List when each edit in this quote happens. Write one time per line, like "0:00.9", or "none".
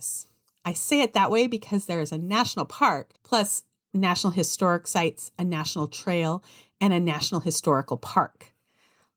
0:03.2